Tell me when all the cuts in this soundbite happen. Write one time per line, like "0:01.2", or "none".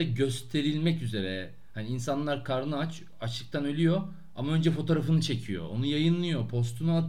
none